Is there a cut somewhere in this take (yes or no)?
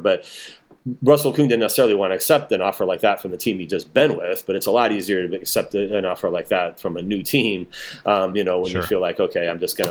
no